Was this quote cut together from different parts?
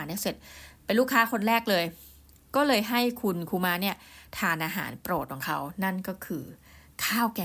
no; 0 cuts

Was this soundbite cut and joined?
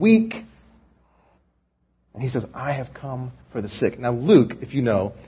yes; 1 cut; at 3.4 s

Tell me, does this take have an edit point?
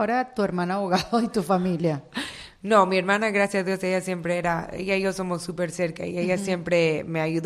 no; 0 cuts

